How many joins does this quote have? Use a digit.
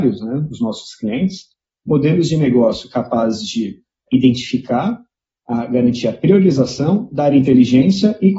0